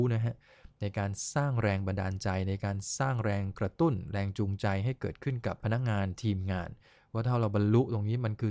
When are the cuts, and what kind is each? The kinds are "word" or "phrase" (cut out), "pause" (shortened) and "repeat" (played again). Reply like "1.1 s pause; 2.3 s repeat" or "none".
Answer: 5.6 s pause